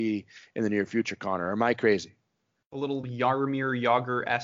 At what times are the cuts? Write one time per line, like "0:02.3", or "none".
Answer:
none

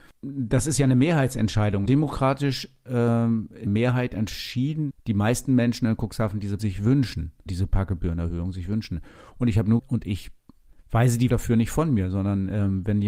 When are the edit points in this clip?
0:01.9
0:03.7
0:04.9
0:06.6
0:07.5
0:09.8
0:11.3

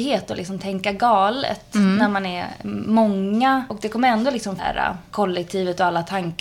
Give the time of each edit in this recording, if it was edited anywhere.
0:04.6

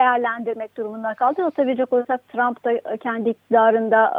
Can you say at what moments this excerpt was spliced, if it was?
none

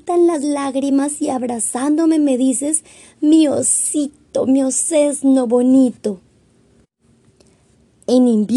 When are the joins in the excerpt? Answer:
none

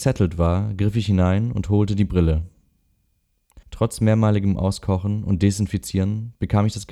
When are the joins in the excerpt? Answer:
0:03.6

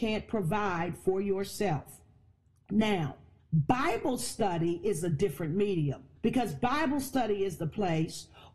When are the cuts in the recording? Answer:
0:03.4
0:06.2

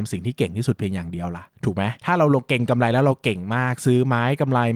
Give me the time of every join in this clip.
0:01.5

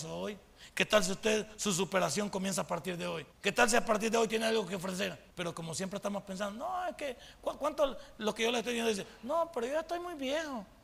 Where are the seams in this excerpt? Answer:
0:03.3
0:05.3

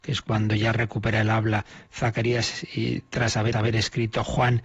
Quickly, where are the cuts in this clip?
0:03.5

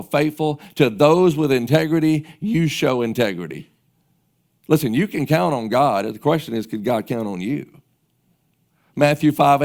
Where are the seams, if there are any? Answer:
none

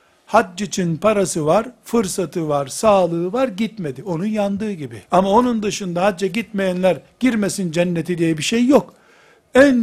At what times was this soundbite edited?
0:05.1

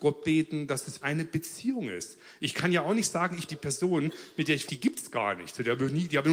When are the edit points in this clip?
0:01.0
0:03.5
0:04.7

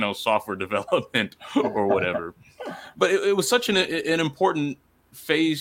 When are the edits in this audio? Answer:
0:02.9

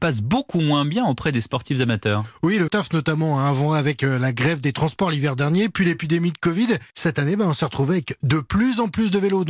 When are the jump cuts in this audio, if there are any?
0:02.7
0:06.9

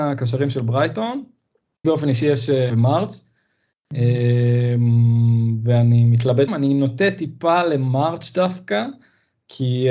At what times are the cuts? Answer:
0:01.8
0:02.7
0:06.5

